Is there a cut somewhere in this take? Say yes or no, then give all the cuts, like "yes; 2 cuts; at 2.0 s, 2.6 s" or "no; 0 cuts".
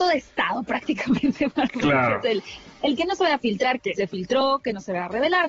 yes; 1 cut; at 3.9 s